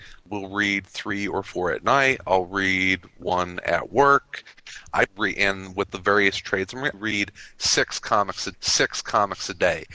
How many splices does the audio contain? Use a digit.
3